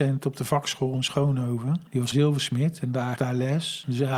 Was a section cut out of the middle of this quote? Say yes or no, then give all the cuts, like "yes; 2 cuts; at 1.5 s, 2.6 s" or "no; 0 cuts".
yes; 2 cuts; at 2.1 s, 3.2 s